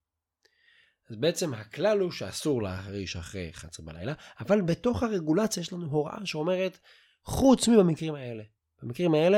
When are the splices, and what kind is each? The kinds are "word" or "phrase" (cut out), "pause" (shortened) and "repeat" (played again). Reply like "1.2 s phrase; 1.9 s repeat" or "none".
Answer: none